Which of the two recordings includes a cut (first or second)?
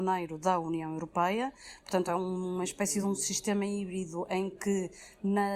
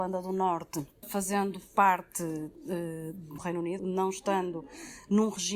second